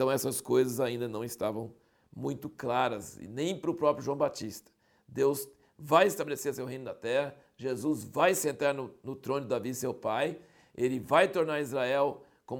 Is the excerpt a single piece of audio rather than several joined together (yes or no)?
yes